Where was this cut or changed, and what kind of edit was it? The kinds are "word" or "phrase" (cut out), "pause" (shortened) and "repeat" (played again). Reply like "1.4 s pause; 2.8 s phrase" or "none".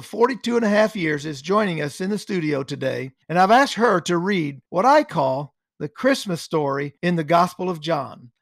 3.2 s pause; 4.7 s pause; 7.0 s pause